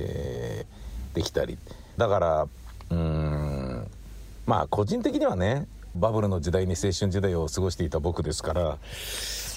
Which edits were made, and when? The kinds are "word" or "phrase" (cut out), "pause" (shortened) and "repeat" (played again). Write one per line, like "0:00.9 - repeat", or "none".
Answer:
0:02.0 - phrase
0:05.9 - phrase